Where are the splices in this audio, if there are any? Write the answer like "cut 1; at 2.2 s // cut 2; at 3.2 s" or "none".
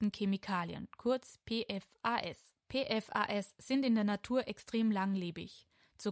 none